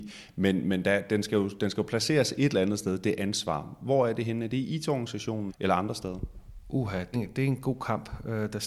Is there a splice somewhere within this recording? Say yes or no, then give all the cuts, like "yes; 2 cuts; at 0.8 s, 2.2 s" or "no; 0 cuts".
yes; 2 cuts; at 5.5 s, 7.1 s